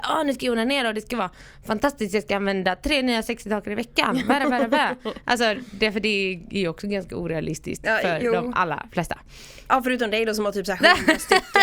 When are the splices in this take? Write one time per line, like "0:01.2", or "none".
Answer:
none